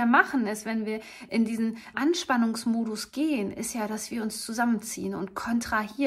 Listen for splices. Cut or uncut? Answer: cut